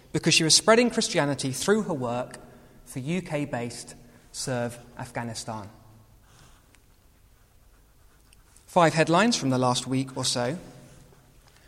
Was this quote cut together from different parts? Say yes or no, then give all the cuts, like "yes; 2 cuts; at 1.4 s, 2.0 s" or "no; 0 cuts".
no; 0 cuts